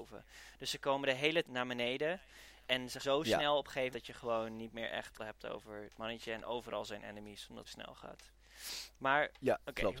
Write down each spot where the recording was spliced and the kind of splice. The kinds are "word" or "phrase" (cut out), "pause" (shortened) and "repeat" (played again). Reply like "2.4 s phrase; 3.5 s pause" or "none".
1.4 s word; 3.0 s word; 3.9 s word; 5.2 s word; 7.6 s word